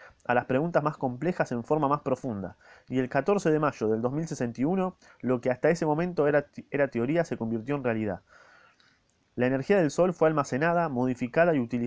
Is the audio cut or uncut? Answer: uncut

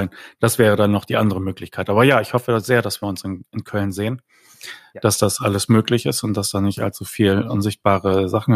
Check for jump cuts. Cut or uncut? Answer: uncut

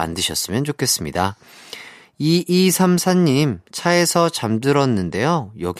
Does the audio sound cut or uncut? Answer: uncut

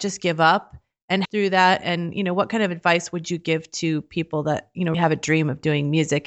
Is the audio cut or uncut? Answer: cut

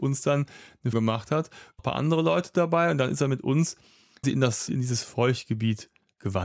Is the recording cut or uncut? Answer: cut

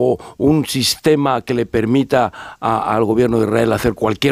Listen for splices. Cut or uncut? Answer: uncut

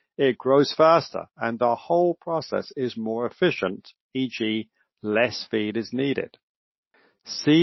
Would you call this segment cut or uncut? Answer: uncut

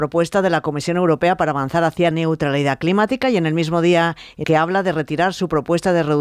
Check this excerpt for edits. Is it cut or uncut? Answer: cut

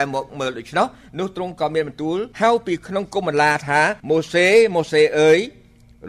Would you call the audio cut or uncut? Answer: cut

